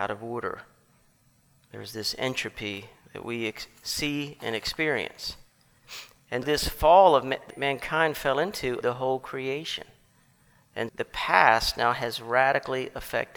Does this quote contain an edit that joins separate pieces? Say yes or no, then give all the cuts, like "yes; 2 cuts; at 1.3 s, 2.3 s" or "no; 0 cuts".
yes; 4 cuts; at 6.4 s, 7.5 s, 8.8 s, 10.9 s